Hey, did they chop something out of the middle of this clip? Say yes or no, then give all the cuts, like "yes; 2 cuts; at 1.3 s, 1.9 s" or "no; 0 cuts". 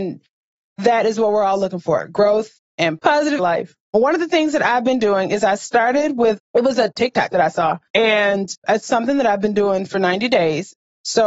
yes; 4 cuts; at 3.4 s, 3.8 s, 6.4 s, 7.3 s